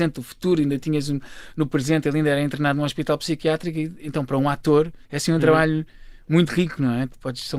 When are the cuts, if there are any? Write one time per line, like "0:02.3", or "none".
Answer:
0:05.0